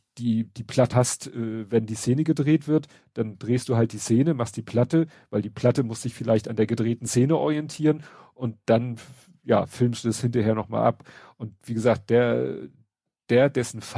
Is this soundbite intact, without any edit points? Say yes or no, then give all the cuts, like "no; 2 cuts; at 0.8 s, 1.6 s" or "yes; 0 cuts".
no; 1 cut; at 0.9 s